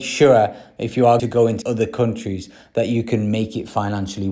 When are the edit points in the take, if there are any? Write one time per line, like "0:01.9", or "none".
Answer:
0:01.2
0:01.6